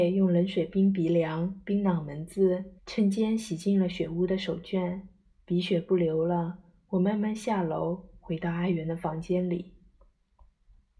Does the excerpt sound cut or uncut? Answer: cut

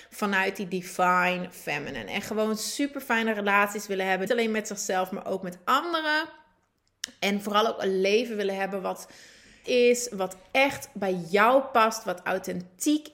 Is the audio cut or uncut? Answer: cut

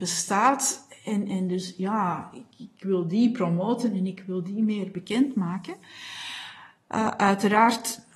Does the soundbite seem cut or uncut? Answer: uncut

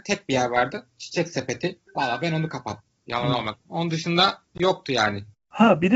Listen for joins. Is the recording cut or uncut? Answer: uncut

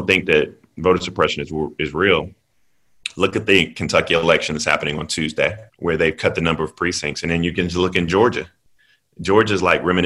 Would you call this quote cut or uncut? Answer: cut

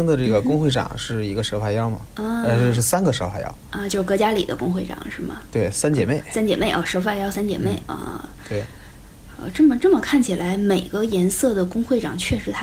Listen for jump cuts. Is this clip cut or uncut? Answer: uncut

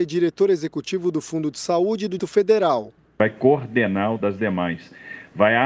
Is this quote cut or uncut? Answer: cut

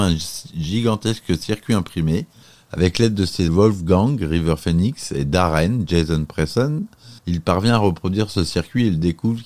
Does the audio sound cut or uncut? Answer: cut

